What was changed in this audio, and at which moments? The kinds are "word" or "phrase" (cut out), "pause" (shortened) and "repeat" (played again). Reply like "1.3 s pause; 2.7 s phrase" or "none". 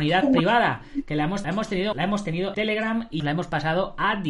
1.4 s phrase; 1.9 s phrase; 2.5 s word; 3.2 s phrase